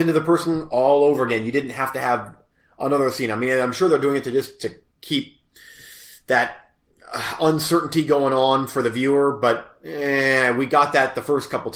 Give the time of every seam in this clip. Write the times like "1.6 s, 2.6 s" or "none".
none